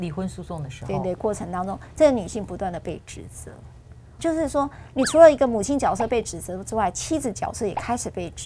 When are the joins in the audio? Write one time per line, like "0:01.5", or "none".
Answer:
0:04.2